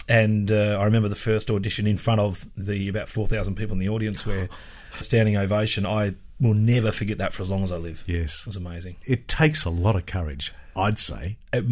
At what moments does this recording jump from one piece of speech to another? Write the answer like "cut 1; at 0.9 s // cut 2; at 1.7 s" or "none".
cut 1; at 5.0 s